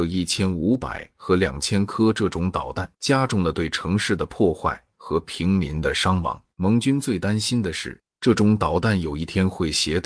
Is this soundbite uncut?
no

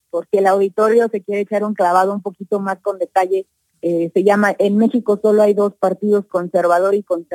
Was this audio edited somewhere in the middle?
no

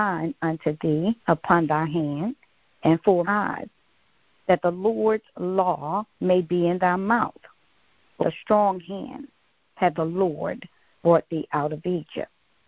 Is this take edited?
yes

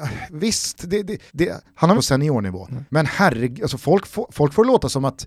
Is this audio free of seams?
no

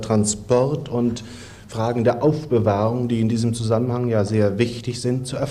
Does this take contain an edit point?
no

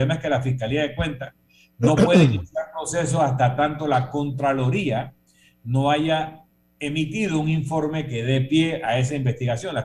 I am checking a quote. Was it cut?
no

